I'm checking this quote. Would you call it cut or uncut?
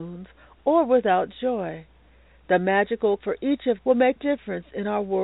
cut